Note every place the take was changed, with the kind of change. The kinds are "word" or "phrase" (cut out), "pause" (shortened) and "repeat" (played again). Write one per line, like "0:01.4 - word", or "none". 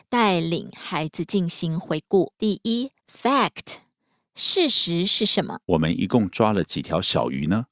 0:02.3 - pause
0:03.0 - pause
0:05.6 - pause